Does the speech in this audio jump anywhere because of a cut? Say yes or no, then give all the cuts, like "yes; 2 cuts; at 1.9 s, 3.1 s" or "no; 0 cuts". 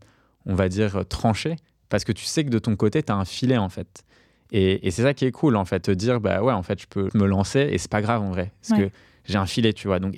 yes; 2 cuts; at 5.8 s, 7.1 s